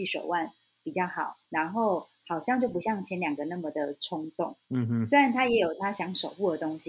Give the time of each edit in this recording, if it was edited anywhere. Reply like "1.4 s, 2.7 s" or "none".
1.4 s, 4.6 s

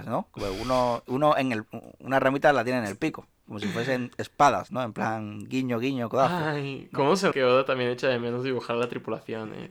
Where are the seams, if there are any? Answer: 7.3 s

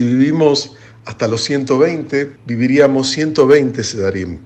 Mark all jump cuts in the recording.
2.4 s

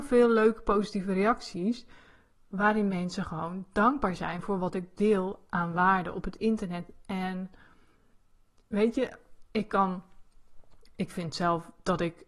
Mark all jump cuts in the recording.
none

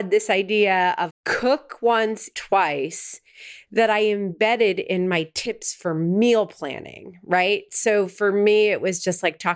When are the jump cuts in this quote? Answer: 1.1 s, 2.3 s

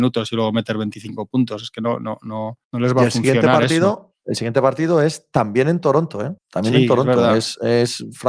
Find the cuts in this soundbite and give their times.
2.6 s, 6.4 s

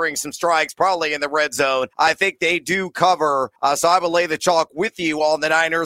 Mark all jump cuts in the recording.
1.9 s, 3.6 s

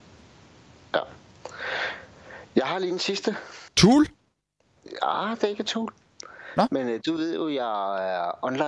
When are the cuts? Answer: 2.4 s, 3.7 s

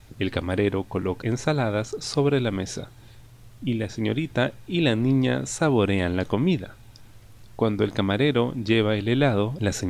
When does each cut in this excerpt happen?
1.2 s

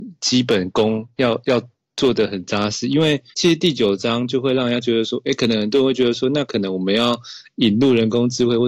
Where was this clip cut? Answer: 3.3 s

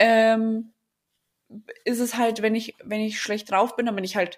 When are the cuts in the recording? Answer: none

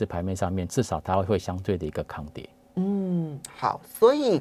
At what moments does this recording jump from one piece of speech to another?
none

